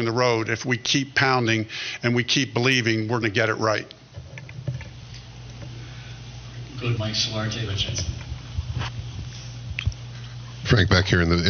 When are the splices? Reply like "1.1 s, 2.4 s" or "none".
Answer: 3.2 s, 7.0 s, 7.7 s